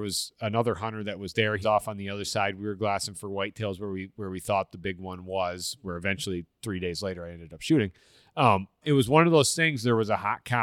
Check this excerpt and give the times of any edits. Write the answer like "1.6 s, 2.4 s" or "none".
1.6 s, 8.8 s